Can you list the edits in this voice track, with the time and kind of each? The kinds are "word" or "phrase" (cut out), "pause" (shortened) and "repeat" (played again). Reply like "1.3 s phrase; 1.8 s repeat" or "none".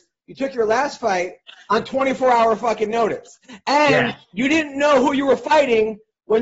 4.2 s pause